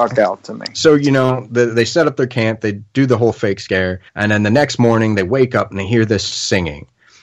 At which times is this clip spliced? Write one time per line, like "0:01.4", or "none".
0:04.1